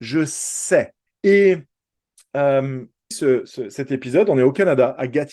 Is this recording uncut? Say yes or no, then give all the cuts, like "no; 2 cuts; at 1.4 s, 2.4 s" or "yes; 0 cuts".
no; 2 cuts; at 1.1 s, 3.1 s